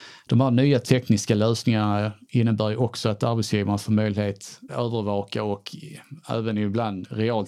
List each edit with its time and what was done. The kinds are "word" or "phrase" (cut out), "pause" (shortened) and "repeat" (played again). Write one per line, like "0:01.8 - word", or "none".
0:04.7 - word